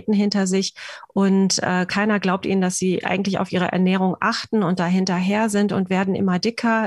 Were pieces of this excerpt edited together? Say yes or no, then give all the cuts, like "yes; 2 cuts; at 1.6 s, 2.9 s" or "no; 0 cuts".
no; 0 cuts